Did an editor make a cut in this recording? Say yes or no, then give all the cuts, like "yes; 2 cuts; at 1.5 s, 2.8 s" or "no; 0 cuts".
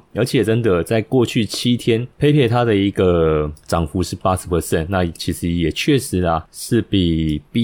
no; 0 cuts